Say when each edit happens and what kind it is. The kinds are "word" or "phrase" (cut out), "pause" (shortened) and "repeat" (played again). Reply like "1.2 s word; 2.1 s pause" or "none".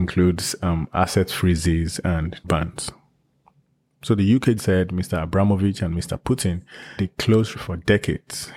2.4 s word; 4.6 s word; 7.0 s word; 7.5 s word